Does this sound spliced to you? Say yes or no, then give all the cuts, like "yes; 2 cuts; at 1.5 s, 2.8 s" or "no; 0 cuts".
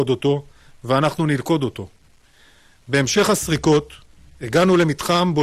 no; 0 cuts